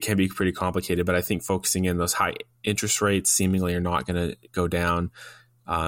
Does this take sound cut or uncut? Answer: uncut